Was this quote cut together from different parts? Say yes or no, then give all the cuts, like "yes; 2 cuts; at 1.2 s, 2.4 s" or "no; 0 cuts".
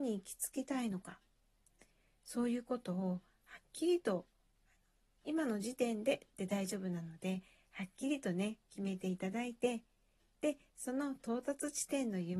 no; 0 cuts